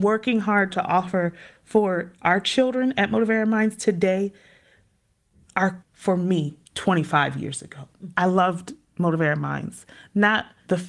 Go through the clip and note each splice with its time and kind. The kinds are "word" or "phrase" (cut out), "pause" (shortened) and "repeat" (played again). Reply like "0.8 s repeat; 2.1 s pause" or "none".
5.8 s phrase; 6.7 s pause